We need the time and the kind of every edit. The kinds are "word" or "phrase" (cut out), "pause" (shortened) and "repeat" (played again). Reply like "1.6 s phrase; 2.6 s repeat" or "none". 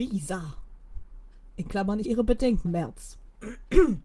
2.0 s word; 2.7 s word